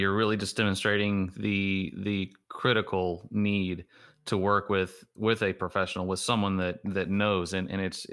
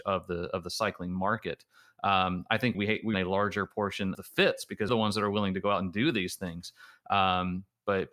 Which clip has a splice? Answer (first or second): second